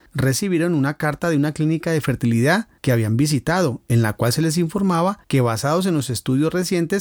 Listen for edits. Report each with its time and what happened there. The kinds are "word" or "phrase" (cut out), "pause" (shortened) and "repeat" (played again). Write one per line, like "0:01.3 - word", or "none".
none